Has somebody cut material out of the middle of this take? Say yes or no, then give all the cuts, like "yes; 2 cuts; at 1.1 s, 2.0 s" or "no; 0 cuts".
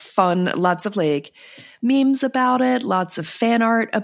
no; 0 cuts